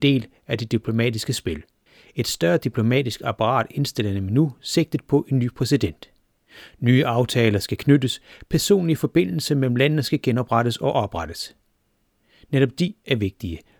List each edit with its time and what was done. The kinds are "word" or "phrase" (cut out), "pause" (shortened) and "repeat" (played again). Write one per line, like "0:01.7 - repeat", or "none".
none